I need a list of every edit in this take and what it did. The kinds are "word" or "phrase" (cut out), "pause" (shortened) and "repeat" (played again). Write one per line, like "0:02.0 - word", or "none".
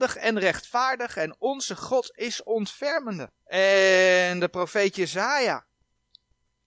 0:03.4 - pause